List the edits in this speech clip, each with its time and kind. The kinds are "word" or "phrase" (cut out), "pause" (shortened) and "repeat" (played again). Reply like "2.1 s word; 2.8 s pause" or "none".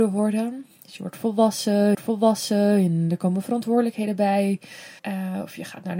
1.9 s repeat; 5.0 s pause